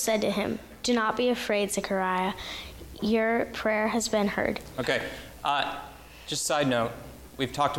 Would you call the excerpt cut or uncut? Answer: uncut